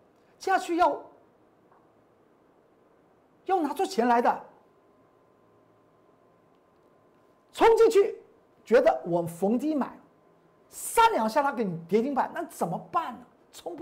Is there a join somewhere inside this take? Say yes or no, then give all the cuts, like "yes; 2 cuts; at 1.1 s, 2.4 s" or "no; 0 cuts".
no; 0 cuts